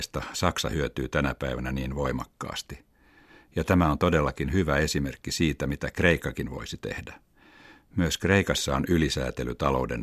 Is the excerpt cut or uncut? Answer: uncut